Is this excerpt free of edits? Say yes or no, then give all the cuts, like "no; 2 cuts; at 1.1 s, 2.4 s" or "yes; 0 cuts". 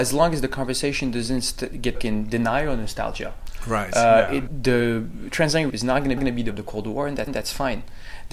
no; 6 cuts; at 1.9 s, 4.5 s, 5.7 s, 6.2 s, 6.5 s, 7.3 s